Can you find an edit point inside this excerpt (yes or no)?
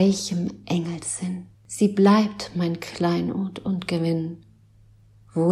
yes